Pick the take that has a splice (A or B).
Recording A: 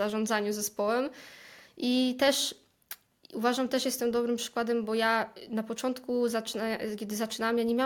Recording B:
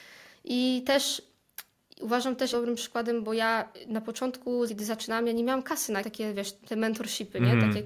B